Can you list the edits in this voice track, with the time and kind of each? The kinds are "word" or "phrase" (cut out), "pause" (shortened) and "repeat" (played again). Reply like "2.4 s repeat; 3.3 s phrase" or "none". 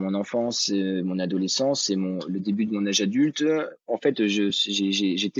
none